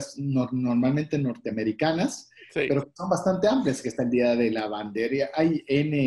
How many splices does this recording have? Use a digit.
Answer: 0